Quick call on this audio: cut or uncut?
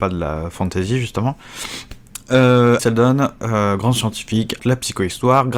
cut